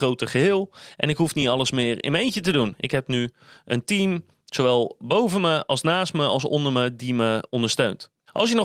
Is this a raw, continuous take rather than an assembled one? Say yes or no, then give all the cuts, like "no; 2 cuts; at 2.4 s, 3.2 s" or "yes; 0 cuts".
yes; 0 cuts